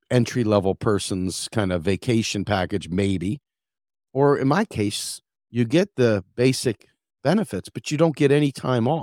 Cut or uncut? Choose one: uncut